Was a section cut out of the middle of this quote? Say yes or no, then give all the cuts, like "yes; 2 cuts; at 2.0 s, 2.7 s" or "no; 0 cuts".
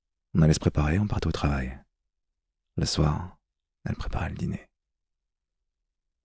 no; 0 cuts